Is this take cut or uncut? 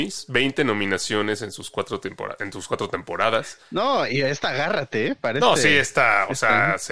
uncut